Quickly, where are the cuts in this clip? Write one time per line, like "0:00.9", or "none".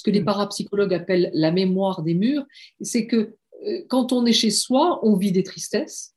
none